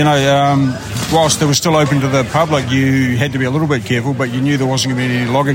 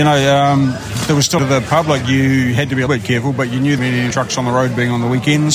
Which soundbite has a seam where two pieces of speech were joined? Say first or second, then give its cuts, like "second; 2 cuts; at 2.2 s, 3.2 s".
second; 5 cuts; at 1.1 s, 1.4 s, 2.9 s, 3.8 s, 4.1 s